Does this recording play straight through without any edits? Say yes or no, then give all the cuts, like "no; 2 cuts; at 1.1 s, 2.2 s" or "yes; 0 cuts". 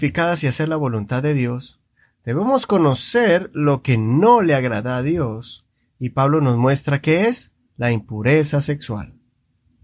yes; 0 cuts